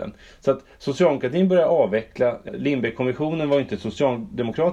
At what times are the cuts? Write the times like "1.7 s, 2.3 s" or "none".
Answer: 2.5 s